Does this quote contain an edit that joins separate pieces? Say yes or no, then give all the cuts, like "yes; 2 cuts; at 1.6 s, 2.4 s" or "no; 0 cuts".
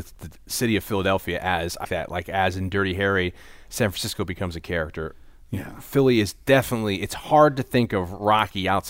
yes; 1 cut; at 1.8 s